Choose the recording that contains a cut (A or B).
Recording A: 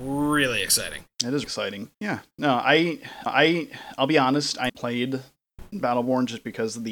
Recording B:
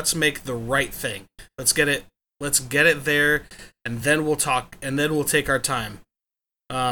A